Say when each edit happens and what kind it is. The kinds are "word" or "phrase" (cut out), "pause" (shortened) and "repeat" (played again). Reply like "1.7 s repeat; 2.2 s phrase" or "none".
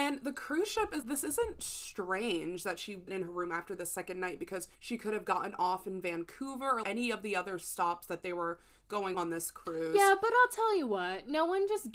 1.0 s word; 3.1 s word; 4.7 s pause; 6.8 s word; 9.1 s word